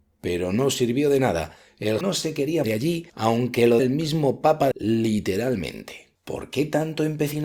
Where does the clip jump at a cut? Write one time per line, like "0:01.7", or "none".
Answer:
0:02.0
0:02.6
0:03.1
0:03.8
0:04.7
0:06.2

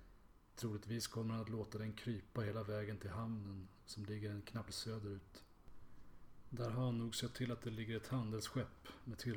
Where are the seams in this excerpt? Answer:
0:04.7

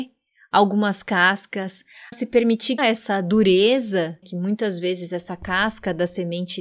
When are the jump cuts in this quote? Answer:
0:02.1
0:02.8
0:04.2

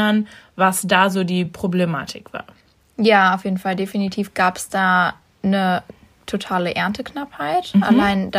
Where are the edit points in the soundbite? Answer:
none

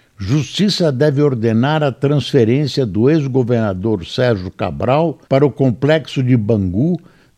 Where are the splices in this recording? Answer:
0:05.2

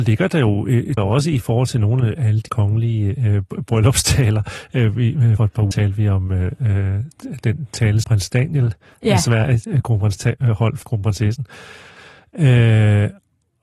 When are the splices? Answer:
0:01.0
0:02.2
0:02.5
0:05.4
0:05.7
0:08.0
0:10.2
0:10.8

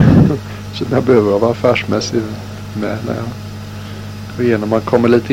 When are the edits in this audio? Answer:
none

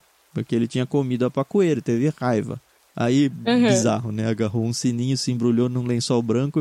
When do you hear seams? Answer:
none

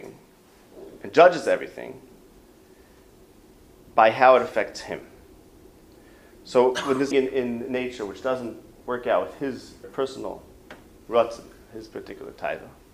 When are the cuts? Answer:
0:07.1
0:09.8

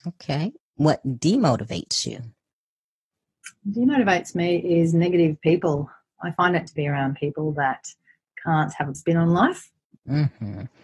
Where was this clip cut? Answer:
0:06.7
0:08.9

